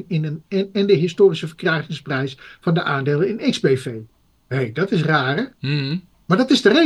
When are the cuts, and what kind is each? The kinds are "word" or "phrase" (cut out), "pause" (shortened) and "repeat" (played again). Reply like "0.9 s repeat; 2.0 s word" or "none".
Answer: none